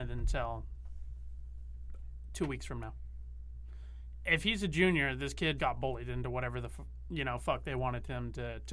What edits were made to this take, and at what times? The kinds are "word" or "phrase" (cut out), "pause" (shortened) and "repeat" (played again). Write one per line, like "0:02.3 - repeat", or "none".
0:05.6 - word